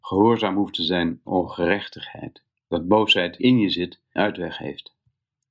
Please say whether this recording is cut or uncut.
cut